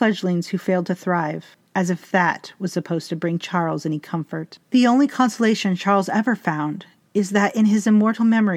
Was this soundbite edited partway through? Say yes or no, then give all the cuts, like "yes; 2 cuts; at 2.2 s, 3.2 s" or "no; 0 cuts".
yes; 2 cuts; at 1.7 s, 4.7 s